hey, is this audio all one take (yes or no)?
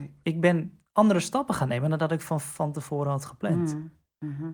yes